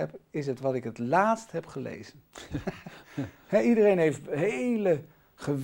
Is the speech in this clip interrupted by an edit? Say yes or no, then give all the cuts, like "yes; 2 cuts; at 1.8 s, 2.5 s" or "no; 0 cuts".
no; 0 cuts